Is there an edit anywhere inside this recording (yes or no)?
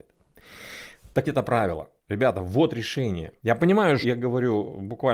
yes